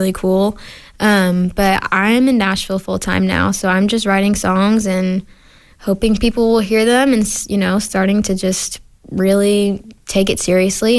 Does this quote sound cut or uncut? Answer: cut